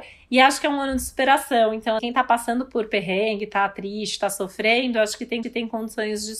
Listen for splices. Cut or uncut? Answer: cut